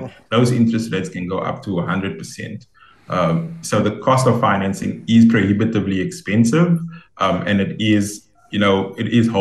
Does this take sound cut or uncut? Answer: uncut